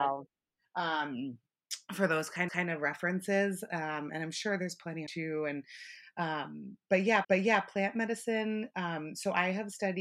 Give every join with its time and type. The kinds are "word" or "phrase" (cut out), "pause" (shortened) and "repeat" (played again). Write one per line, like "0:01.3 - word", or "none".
0:02.5 - repeat
0:05.1 - word
0:07.2 - repeat